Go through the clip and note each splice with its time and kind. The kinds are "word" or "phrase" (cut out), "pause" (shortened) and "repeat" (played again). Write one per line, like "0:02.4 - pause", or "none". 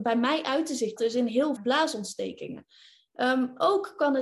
0:01.0 - word
0:01.6 - word